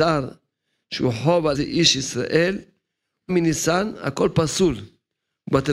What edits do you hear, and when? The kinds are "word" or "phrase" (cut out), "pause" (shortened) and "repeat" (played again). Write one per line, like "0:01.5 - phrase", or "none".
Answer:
0:01.5 - word
0:03.3 - word